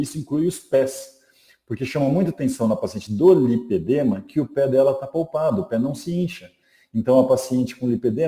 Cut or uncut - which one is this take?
uncut